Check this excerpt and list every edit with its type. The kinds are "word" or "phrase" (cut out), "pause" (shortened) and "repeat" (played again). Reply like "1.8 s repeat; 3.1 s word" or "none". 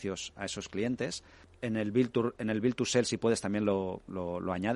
1.4 s pause